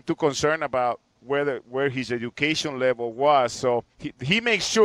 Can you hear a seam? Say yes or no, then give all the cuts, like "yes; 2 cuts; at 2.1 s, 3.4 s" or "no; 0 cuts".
yes; 1 cut; at 3.9 s